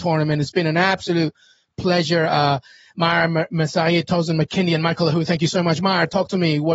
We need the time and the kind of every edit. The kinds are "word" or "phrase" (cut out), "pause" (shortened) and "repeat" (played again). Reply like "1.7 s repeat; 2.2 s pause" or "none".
none